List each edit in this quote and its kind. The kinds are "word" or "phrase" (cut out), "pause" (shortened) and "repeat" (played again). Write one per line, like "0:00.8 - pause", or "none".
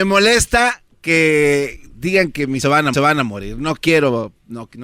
0:02.6 - word
0:02.9 - repeat